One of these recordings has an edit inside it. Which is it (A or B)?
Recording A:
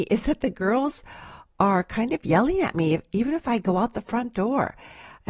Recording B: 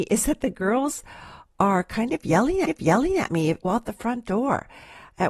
B